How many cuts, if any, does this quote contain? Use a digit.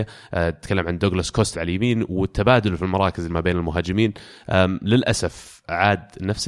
2